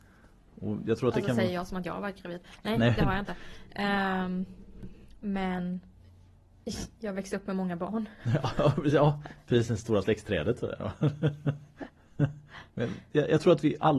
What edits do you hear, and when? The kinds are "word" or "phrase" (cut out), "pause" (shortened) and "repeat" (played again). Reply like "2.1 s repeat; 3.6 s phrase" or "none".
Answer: 12.7 s pause